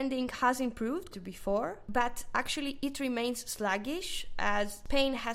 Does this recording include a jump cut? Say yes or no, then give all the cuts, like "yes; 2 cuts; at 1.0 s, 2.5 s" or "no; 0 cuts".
yes; 1 cut; at 1.1 s